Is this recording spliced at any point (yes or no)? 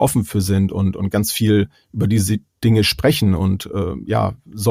no